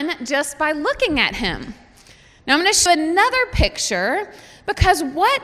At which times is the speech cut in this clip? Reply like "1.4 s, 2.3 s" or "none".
2.9 s

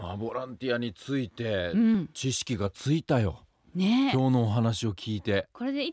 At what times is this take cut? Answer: none

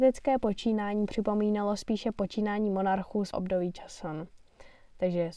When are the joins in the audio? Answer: 3.3 s

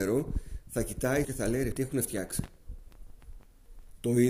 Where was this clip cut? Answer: 1.2 s, 1.7 s

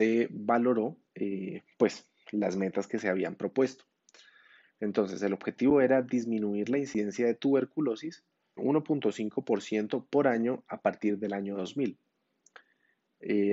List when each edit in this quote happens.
1.1 s, 8.6 s

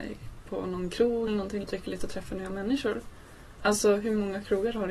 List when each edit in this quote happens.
1.3 s, 1.6 s, 2.0 s

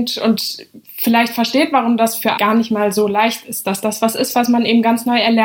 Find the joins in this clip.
2.4 s

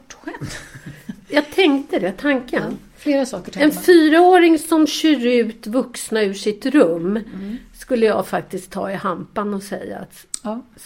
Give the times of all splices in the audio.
none

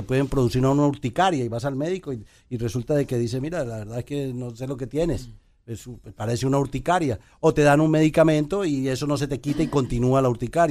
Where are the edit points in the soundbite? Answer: none

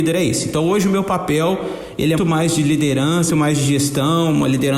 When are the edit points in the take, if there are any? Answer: 2.2 s, 3.3 s

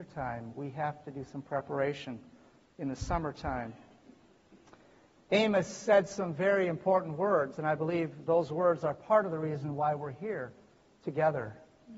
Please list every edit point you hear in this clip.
none

